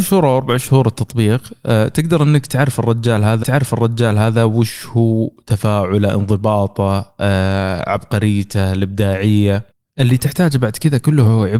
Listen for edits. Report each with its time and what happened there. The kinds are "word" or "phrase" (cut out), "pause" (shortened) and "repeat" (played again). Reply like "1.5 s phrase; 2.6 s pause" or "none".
3.4 s repeat; 9.7 s pause